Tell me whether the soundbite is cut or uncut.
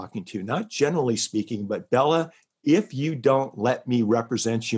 uncut